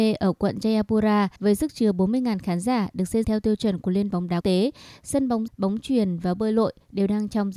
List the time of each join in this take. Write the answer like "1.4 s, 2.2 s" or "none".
1.4 s, 3.2 s, 4.1 s, 4.4 s, 5.5 s